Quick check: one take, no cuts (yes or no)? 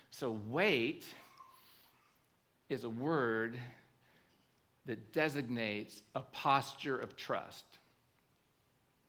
yes